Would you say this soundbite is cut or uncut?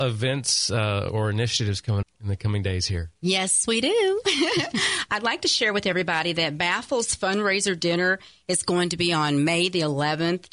cut